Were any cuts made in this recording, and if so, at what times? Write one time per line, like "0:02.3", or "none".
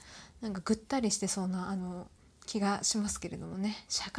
none